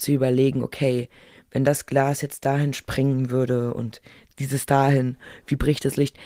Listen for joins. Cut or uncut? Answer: uncut